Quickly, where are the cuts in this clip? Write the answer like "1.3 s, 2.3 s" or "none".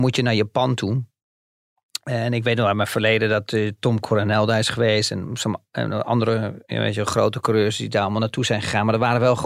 none